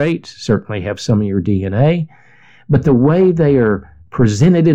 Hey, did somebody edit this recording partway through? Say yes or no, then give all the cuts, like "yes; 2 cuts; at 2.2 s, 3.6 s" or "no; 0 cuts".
no; 0 cuts